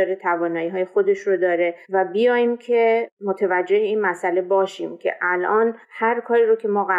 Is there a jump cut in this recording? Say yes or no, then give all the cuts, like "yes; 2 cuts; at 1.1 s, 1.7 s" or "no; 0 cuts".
yes; 2 cuts; at 1.8 s, 5.8 s